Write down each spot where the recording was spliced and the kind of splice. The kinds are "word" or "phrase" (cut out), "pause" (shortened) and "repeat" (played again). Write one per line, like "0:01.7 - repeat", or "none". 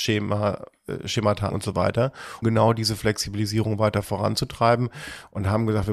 0:01.5 - word
0:02.4 - word